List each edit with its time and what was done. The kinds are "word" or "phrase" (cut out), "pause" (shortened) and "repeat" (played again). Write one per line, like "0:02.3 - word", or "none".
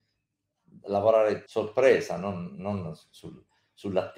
0:01.5 - phrase